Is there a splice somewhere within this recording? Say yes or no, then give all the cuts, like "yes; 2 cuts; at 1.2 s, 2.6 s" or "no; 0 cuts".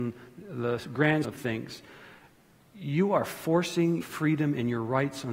yes; 2 cuts; at 1.2 s, 4.0 s